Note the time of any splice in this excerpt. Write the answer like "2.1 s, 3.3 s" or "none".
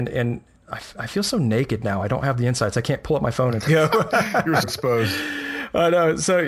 3.7 s, 4.6 s